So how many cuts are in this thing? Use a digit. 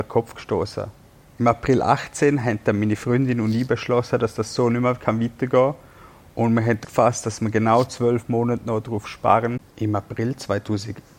1